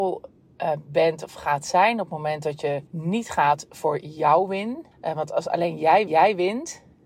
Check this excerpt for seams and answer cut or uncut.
cut